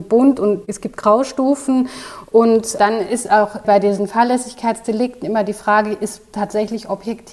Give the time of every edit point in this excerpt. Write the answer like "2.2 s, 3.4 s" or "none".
none